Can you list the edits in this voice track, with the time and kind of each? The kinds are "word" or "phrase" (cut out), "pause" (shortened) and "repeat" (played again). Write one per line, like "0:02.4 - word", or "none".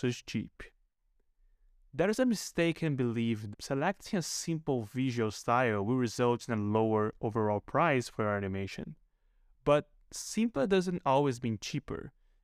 0:03.5 - word